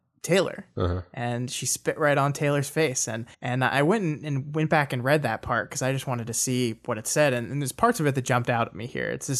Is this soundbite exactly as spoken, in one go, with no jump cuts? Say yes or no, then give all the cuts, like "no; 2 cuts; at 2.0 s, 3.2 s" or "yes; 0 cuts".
no; 1 cut; at 3.3 s